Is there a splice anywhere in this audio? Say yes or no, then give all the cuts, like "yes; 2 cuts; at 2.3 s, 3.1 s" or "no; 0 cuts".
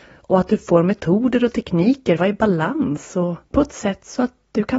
yes; 2 cuts; at 2.2 s, 3.4 s